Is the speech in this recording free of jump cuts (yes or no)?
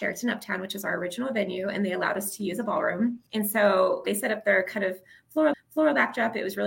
no